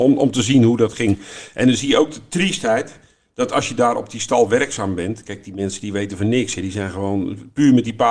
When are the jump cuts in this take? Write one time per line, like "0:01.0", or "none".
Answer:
none